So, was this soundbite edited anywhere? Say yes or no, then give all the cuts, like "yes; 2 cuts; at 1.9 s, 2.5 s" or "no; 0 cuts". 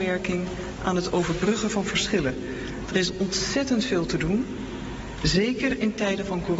no; 0 cuts